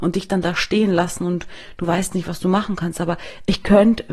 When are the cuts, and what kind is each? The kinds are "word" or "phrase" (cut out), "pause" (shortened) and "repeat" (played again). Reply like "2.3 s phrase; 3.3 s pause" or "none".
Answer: none